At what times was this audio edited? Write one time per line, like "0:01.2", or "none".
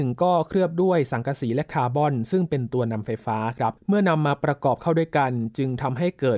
0:03.8